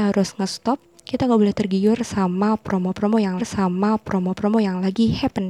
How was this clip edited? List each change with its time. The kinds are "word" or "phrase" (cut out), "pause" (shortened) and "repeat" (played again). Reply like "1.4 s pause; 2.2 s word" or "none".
3.4 s repeat